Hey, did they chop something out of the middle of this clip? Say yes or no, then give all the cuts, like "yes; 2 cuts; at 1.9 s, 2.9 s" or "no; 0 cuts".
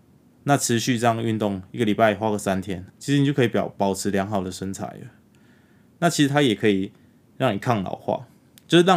yes; 1 cut; at 2.9 s